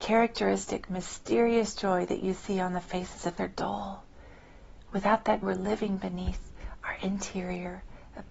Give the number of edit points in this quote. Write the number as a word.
two